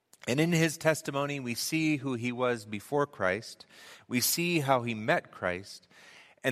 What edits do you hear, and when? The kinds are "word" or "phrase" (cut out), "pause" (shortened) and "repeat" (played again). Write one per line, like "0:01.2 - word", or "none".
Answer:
none